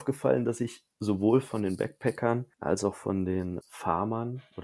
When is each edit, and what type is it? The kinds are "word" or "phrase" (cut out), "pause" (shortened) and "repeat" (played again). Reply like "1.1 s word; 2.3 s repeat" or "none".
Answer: 2.5 s pause; 3.6 s word

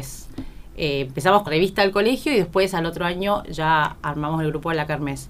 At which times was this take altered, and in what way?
1.5 s word

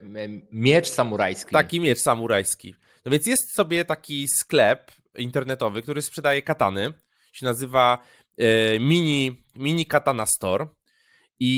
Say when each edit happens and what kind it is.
none

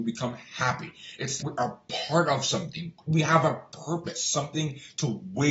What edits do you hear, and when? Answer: 1.4 s word

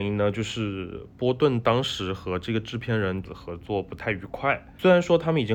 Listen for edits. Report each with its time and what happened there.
3.3 s phrase

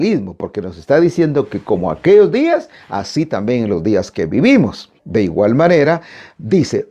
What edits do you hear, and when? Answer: 5.0 s pause

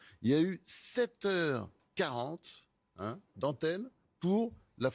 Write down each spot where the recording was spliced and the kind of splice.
none

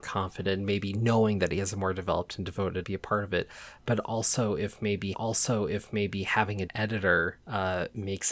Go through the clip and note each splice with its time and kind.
2.8 s phrase; 5.1 s repeat; 6.7 s word; 7.4 s pause

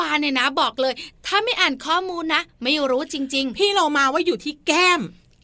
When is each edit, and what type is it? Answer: none

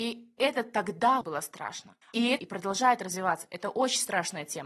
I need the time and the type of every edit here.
1.2 s word; 2.0 s pause; 2.4 s phrase

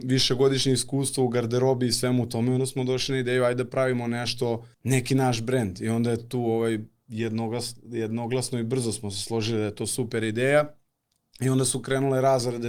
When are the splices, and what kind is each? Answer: 4.7 s pause

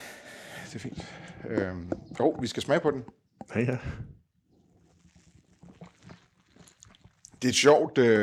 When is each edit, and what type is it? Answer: none

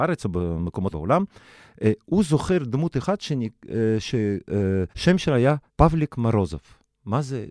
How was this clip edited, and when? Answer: 0.9 s word; 4.9 s pause; 5.7 s pause

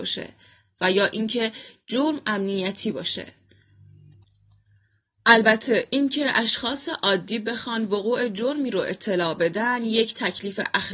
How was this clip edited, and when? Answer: none

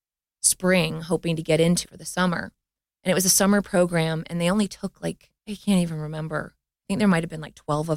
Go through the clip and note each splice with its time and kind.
1.8 s word; 5.4 s pause

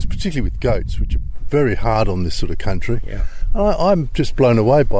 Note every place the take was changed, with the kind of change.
none

